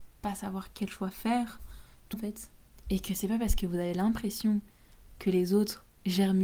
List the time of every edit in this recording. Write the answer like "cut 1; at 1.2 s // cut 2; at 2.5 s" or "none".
cut 1; at 2.1 s